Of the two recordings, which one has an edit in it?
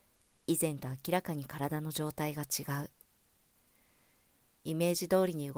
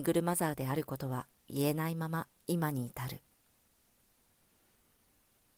second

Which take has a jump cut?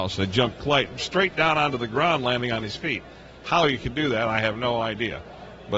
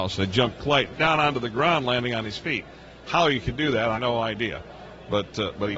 second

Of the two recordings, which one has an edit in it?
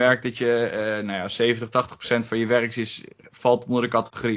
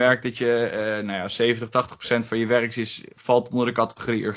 second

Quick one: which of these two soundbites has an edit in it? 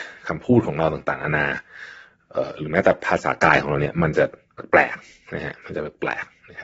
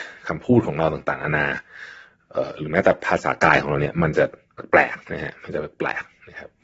second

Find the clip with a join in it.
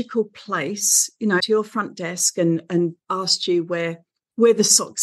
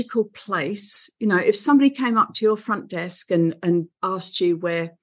first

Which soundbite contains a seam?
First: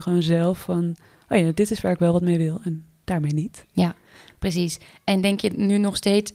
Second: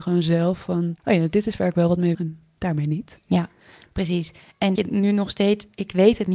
second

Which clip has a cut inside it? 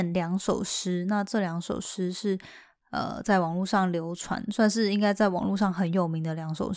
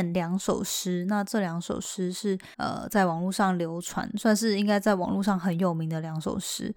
second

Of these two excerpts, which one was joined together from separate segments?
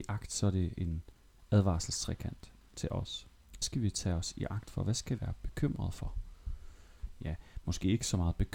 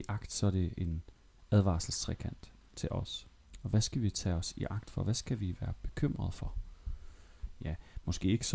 first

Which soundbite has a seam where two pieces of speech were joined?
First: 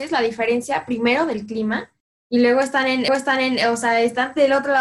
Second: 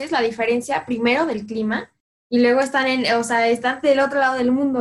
first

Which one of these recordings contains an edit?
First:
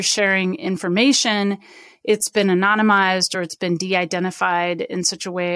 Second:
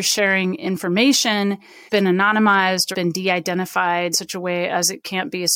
second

